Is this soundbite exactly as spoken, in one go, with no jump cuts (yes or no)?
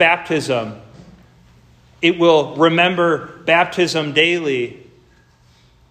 yes